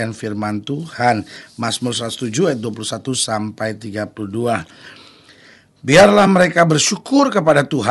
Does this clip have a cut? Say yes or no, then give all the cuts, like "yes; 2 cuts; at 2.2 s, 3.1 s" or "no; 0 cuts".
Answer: no; 0 cuts